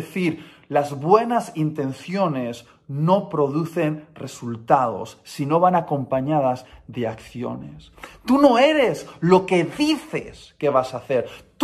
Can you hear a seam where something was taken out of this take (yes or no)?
no